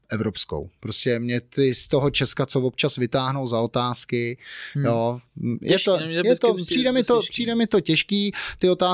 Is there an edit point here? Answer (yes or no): no